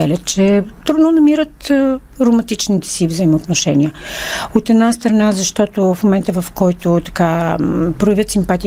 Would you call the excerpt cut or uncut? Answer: uncut